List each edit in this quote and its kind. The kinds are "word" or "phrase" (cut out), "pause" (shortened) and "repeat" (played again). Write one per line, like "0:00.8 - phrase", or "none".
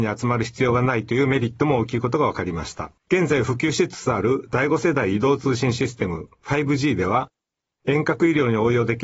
0:03.0 - pause